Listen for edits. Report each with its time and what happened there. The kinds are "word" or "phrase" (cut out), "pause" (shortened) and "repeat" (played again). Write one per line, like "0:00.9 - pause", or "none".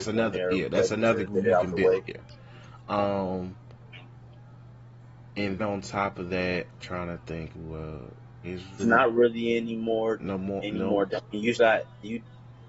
0:01.2 - word
0:05.6 - word
0:06.8 - word
0:07.5 - word
0:08.4 - word
0:08.8 - word
0:11.1 - word
0:11.6 - word